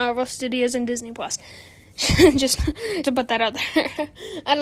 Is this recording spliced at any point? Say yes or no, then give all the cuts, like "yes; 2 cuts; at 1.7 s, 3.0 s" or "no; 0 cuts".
yes; 1 cut; at 3.0 s